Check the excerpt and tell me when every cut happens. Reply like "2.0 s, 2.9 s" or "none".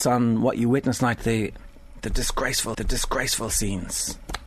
1.0 s, 2.7 s